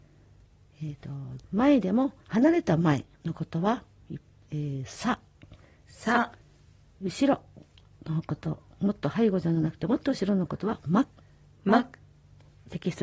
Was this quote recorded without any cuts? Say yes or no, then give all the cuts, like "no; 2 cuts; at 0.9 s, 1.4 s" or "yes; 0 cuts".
no; 4 cuts; at 1.4 s, 2.2 s, 6.4 s, 11.1 s